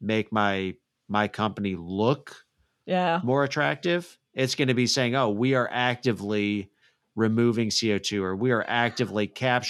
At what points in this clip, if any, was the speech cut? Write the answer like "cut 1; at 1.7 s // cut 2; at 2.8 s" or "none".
none